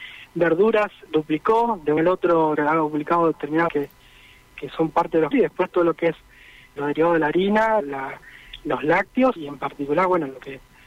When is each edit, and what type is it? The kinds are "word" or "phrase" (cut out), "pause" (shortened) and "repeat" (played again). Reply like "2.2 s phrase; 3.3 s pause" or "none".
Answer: 1.1 s word; 2.0 s word; 2.6 s word; 3.7 s word; 5.3 s word; 6.8 s word; 7.8 s word; 9.4 s word